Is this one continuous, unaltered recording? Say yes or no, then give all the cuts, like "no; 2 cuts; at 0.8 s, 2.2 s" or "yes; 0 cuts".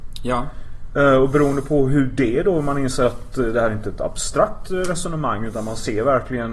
yes; 0 cuts